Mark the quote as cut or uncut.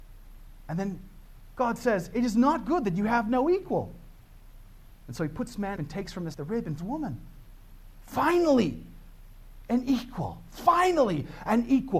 cut